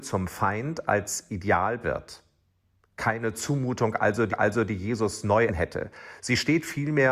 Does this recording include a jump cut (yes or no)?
yes